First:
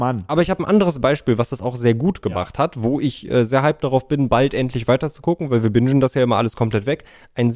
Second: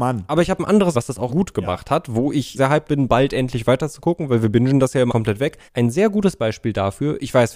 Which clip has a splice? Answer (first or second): second